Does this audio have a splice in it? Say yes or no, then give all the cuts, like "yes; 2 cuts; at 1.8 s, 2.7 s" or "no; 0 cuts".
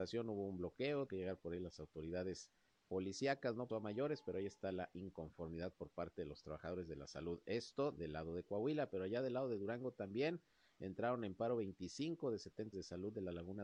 yes; 3 cuts; at 1.1 s, 3.7 s, 12.7 s